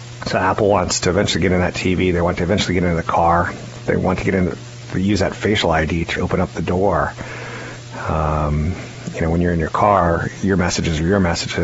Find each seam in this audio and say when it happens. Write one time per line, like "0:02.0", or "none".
0:06.2